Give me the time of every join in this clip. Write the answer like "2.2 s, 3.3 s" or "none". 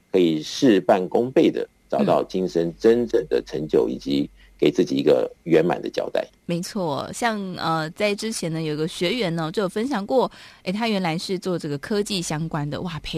6.4 s